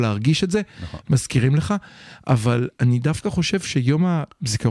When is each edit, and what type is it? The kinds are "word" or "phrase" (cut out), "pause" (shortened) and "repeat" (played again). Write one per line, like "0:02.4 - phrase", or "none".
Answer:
none